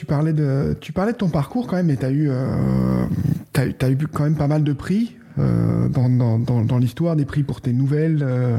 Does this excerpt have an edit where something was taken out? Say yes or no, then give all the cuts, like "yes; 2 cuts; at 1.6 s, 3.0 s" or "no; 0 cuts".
no; 0 cuts